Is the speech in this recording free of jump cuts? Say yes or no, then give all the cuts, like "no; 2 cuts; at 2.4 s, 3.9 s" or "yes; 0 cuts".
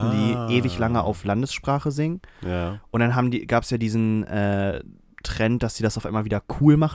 yes; 0 cuts